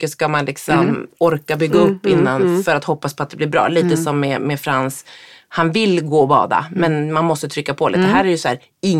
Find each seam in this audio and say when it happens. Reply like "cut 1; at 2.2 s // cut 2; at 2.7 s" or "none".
none